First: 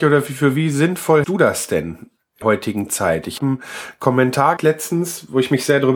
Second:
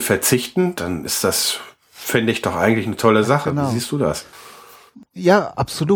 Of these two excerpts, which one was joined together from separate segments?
first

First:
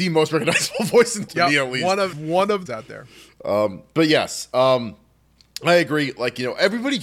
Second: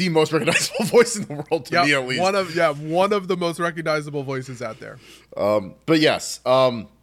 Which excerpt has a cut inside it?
first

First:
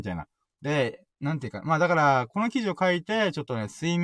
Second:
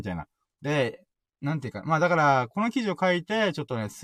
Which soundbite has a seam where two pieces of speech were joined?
first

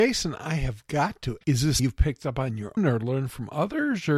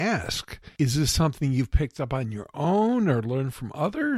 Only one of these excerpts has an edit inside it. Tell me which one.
first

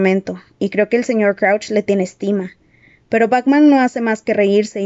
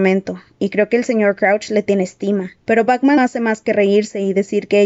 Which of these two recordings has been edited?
second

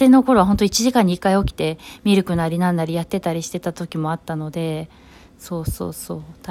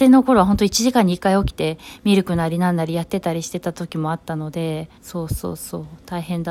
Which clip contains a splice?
second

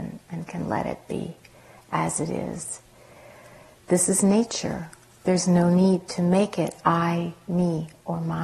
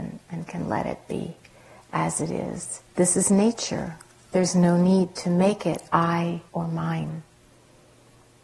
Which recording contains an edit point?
second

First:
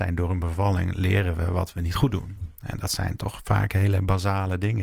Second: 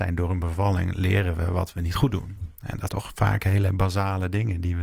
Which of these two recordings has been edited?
second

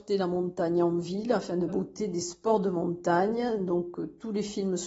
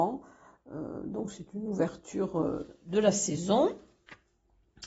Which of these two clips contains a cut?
first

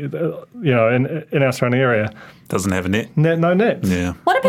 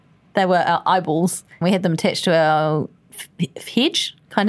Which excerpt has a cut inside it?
second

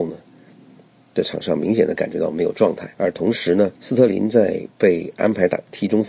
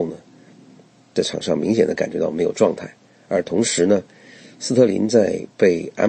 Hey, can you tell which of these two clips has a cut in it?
first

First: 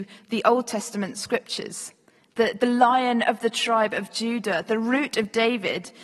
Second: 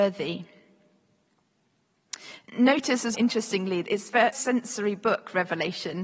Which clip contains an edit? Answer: second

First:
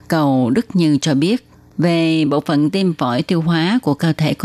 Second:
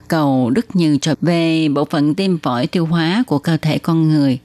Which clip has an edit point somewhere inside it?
second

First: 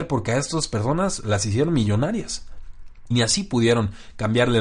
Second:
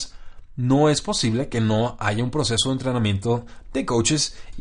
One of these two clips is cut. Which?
first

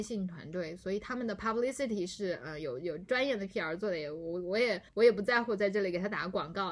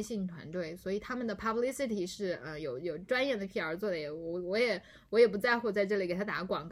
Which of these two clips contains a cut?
first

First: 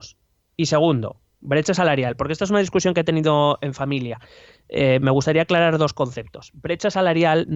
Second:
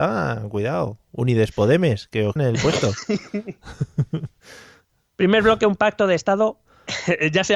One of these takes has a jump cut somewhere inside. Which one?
second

